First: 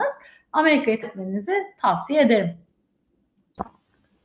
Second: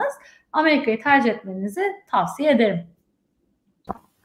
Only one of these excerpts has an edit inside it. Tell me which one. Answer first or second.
first